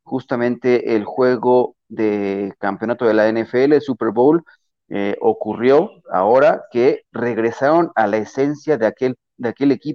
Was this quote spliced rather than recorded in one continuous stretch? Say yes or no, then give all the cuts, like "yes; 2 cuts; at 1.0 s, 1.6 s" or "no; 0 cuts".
no; 0 cuts